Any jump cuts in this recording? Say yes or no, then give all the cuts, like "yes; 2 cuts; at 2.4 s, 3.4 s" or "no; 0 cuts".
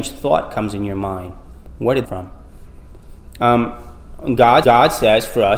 yes; 2 cuts; at 2.0 s, 4.6 s